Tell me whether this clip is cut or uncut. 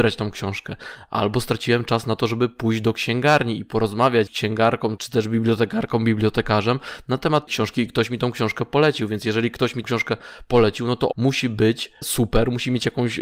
cut